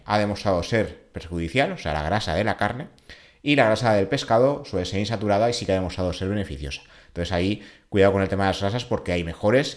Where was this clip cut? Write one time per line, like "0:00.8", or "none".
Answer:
none